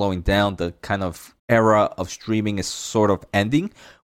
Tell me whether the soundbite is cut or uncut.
cut